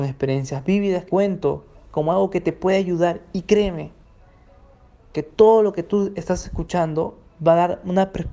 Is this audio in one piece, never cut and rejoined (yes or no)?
no